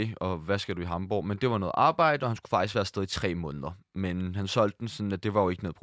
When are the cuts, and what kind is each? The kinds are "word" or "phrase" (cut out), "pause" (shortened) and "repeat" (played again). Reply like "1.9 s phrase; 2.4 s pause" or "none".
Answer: none